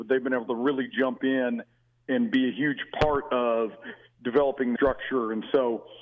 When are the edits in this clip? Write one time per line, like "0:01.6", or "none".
0:04.8